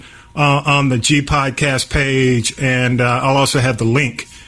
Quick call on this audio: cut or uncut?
uncut